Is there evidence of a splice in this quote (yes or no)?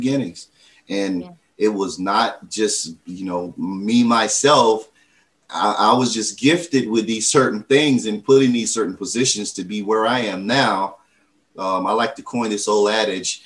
no